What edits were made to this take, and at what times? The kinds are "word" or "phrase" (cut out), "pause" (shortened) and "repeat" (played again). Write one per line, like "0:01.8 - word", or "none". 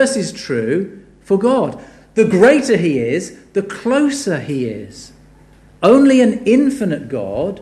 none